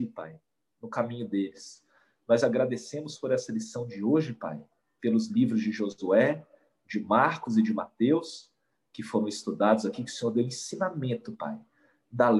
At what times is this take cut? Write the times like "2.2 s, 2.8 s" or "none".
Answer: none

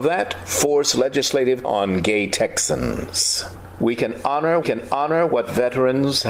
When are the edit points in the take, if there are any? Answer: 1.6 s, 4.6 s

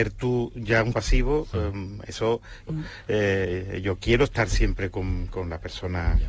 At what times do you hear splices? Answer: 0.9 s, 2.7 s

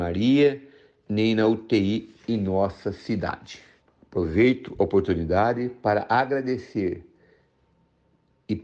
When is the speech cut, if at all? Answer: 3.8 s

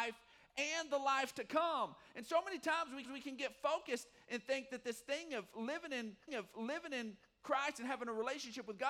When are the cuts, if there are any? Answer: 3.0 s, 6.3 s

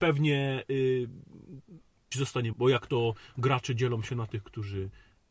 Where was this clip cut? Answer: 2.1 s, 2.5 s

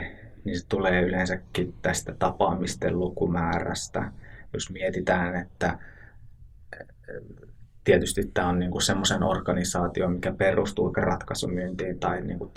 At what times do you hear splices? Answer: 10.9 s

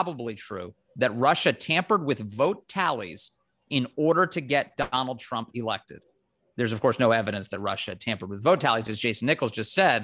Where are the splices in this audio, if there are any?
none

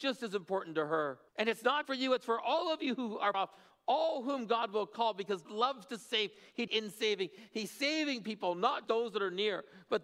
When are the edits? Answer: 1.3 s, 1.8 s, 3.3 s, 5.5 s, 6.7 s, 8.8 s

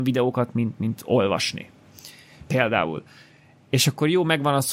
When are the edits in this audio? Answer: none

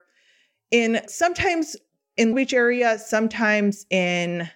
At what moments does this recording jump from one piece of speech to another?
1.1 s, 2.3 s

